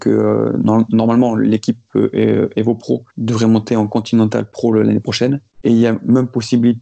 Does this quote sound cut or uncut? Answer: cut